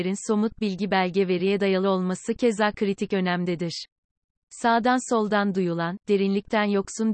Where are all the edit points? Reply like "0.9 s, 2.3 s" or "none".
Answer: none